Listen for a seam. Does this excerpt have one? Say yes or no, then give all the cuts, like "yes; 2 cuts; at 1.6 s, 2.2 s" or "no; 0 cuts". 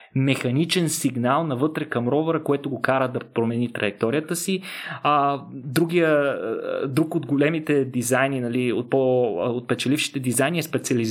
no; 0 cuts